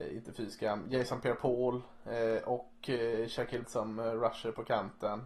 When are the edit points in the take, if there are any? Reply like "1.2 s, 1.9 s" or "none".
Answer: 3.6 s